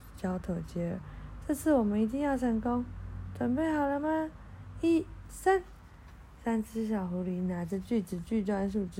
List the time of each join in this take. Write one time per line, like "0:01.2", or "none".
0:05.3